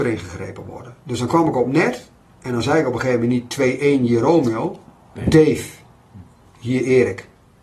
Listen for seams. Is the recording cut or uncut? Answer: uncut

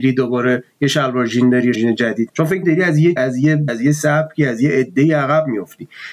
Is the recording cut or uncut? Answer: cut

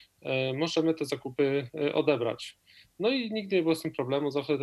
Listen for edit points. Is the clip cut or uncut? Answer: uncut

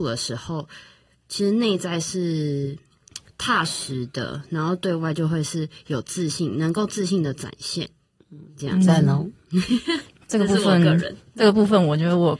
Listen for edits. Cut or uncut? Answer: uncut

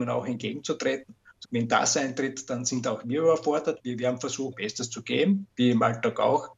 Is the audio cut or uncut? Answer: cut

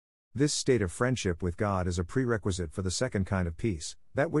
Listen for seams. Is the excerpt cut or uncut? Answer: uncut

